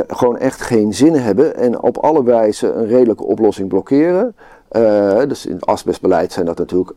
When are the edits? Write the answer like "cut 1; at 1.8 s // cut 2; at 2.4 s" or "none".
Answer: none